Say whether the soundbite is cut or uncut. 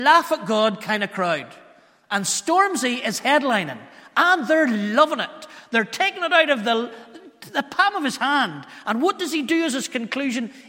uncut